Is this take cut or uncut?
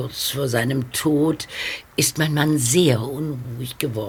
cut